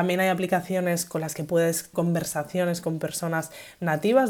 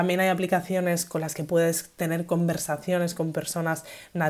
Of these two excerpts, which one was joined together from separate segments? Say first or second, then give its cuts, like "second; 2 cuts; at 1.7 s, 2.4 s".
first; 1 cut; at 1.9 s